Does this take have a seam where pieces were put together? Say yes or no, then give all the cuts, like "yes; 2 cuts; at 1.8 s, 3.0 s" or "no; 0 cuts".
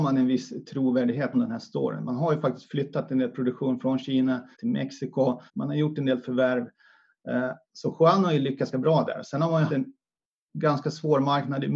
yes; 6 cuts; at 1.3 s, 4.5 s, 5.5 s, 7.6 s, 8.7 s, 9.7 s